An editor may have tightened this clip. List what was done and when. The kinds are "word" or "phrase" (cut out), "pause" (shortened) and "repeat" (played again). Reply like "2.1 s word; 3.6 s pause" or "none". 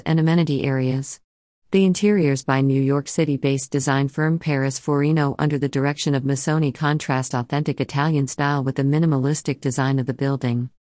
none